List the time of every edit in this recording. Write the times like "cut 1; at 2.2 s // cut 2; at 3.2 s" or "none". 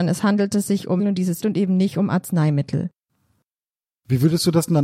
cut 1; at 1.0 s // cut 2; at 1.4 s